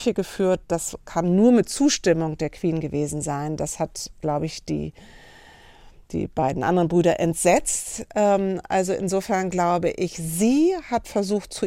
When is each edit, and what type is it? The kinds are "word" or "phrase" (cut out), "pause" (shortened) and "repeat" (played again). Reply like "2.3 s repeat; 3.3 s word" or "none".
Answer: none

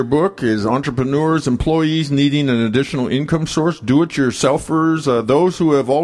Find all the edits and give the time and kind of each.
none

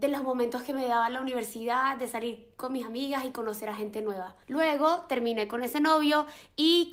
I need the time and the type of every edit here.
4.4 s pause

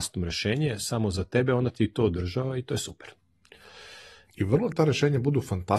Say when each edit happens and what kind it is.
4.7 s word

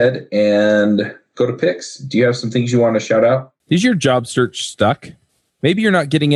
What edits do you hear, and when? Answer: 3.6 s pause

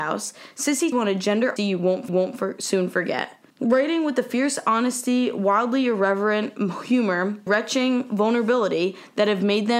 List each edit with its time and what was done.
0.9 s phrase; 1.6 s word; 2.1 s repeat; 3.5 s pause; 7.5 s word

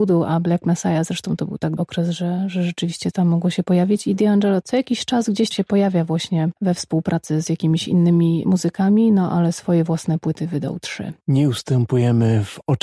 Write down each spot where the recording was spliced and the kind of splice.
1.8 s word; 3.1 s word; 5.5 s word

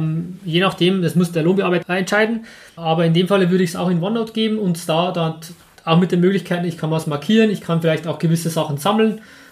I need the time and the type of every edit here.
1.3 s word; 1.8 s word; 2.8 s word

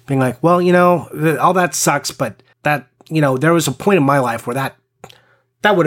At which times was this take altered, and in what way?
2.5 s pause

